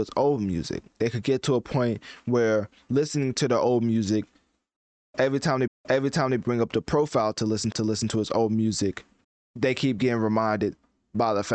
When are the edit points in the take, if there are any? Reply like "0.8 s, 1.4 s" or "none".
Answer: 5.7 s, 7.7 s, 9.2 s